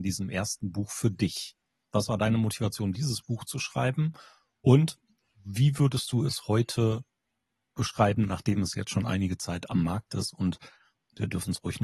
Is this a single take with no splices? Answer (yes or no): yes